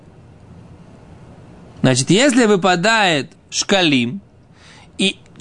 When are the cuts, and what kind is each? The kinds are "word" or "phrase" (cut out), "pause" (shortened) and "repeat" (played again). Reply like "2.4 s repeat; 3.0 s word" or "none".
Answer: 3.3 s word